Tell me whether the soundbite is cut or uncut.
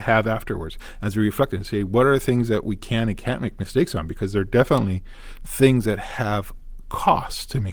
uncut